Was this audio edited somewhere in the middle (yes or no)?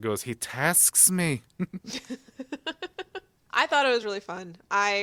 no